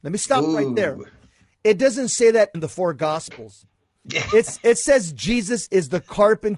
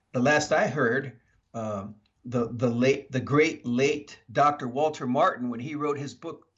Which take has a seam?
first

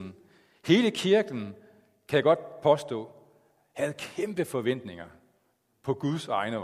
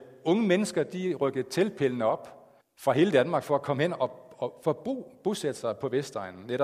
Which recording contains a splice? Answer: second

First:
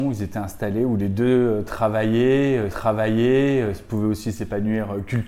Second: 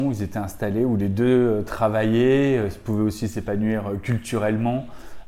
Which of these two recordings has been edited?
first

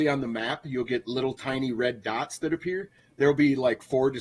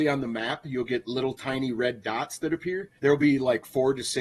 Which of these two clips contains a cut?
second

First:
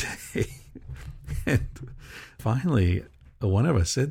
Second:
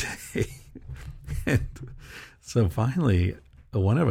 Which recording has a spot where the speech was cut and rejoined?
first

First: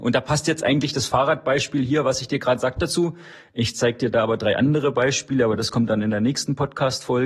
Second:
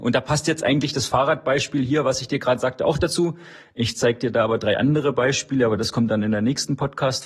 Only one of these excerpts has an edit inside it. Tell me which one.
first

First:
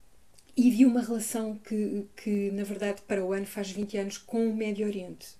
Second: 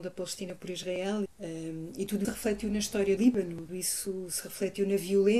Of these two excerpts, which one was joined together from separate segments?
second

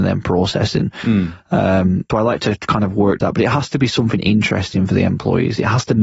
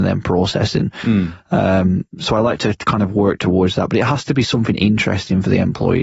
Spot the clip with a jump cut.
first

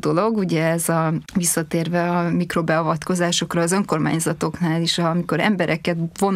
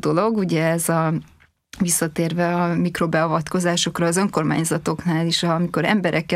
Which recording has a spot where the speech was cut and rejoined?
first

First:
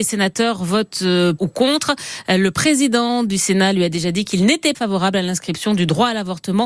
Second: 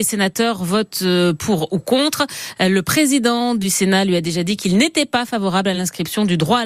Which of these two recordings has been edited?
first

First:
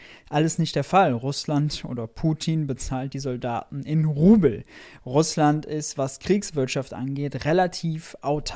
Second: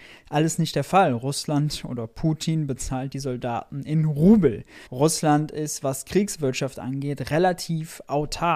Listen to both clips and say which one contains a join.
second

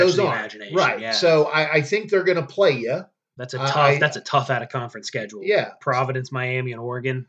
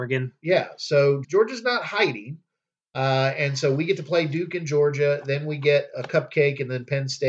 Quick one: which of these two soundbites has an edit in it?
second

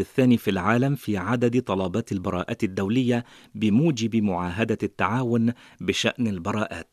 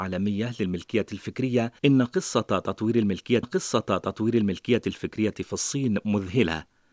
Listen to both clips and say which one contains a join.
second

